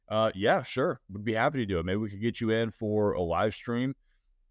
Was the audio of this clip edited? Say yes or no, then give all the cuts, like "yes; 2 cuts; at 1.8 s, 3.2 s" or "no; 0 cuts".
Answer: no; 0 cuts